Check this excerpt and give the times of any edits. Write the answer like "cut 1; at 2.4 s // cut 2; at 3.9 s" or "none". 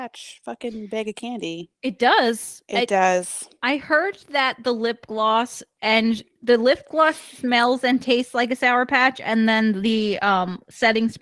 cut 1; at 3.5 s